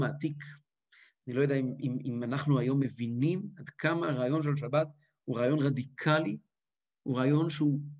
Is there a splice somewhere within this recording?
no; 0 cuts

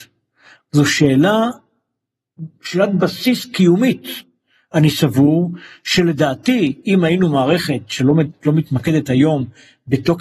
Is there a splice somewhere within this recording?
no; 0 cuts

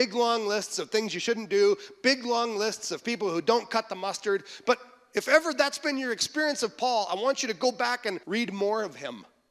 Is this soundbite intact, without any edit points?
no; 1 cut; at 8.2 s

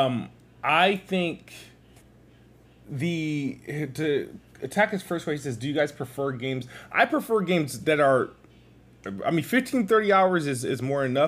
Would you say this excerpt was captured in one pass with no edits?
yes; 0 cuts

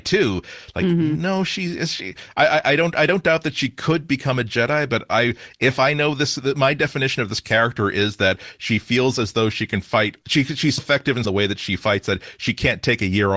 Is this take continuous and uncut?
no; 3 cuts; at 10.2 s, 10.8 s, 11.2 s

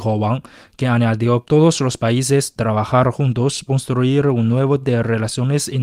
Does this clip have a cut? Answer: yes; 4 cuts; at 1.4 s, 2.6 s, 3.7 s, 4.8 s

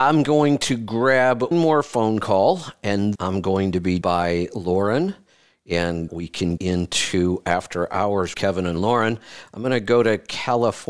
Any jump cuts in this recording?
yes; 6 cuts; at 1.5 s, 3.1 s, 4.0 s, 6.1 s, 6.6 s, 8.3 s

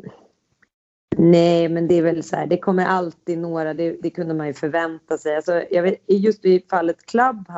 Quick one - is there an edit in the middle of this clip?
no; 0 cuts

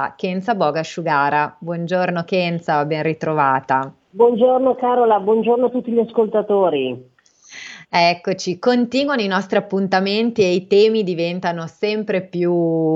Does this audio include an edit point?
no; 0 cuts

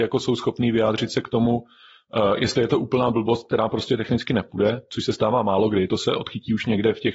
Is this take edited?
no; 0 cuts

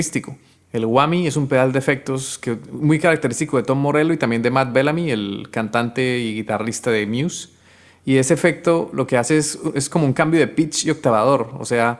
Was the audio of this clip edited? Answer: no; 0 cuts

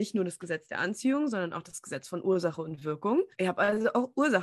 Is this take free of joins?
no; 1 cut; at 3.3 s

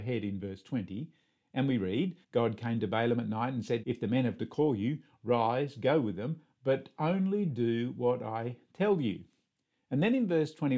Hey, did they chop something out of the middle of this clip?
yes; 3 cuts; at 2.2 s, 3.8 s, 4.4 s

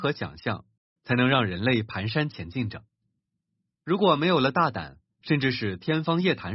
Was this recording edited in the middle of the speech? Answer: no; 0 cuts

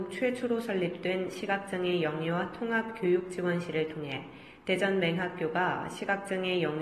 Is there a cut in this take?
no; 0 cuts

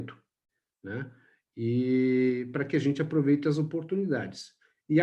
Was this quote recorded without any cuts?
yes; 0 cuts

